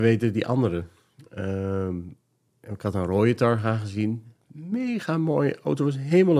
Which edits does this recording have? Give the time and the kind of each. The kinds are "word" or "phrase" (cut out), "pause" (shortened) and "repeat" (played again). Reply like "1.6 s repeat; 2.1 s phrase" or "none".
none